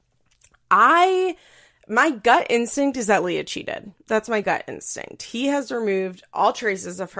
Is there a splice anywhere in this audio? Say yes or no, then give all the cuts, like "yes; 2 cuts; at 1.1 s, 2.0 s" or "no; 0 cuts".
no; 0 cuts